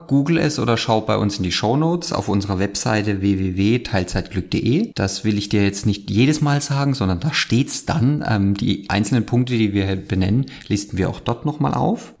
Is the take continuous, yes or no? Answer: yes